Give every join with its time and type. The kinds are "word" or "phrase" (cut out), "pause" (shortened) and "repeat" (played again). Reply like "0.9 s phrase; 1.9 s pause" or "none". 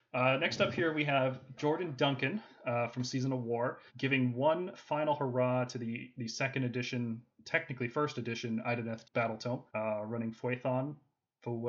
3.9 s pause; 9.0 s word; 9.7 s pause